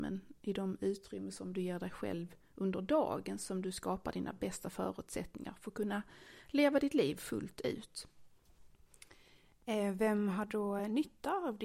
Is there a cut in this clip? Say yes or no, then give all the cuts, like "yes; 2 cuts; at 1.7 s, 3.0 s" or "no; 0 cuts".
no; 0 cuts